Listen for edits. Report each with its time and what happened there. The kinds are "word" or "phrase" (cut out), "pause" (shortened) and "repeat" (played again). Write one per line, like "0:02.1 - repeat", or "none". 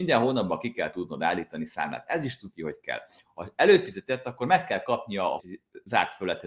0:05.4 - word